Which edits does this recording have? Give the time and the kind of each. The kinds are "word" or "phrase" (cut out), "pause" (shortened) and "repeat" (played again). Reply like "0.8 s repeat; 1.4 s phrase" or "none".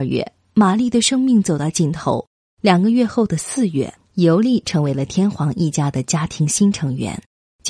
none